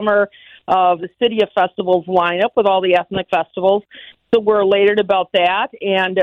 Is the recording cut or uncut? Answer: cut